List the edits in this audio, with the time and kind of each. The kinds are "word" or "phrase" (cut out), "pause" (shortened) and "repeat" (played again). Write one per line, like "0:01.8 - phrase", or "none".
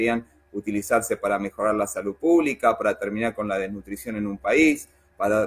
none

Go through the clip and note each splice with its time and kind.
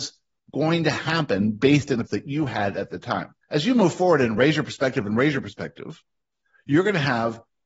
0:02.1 - word
0:03.4 - pause

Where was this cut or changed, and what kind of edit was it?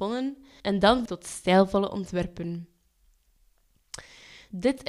0:01.1 - word

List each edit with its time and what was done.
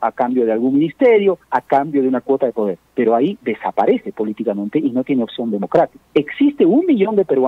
0:01.4 - pause
0:02.9 - pause
0:06.1 - pause

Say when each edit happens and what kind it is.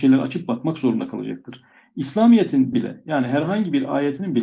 0:02.7 - phrase

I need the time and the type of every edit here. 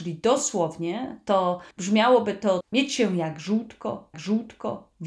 0:01.7 - pause
0:02.6 - word
0:04.1 - repeat

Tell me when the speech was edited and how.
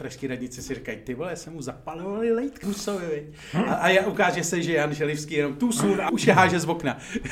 0:02.6 - word
0:06.1 - word

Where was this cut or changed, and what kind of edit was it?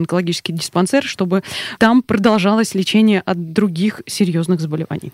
0:01.8 - word

